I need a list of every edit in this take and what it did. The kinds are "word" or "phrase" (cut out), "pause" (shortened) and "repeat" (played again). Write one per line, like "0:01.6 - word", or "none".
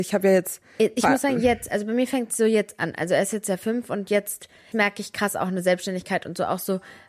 0:04.7 - word